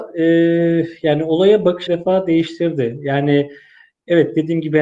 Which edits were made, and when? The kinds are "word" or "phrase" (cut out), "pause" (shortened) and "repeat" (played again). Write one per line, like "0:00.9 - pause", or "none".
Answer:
0:01.9 - phrase